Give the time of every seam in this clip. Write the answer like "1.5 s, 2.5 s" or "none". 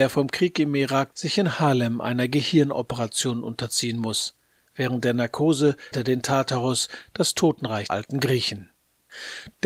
1.1 s, 5.9 s, 7.9 s